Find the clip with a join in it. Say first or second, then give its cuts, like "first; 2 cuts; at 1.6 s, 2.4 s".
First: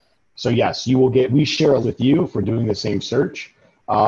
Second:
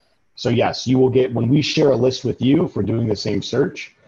first; 2 cuts; at 1.3 s, 1.8 s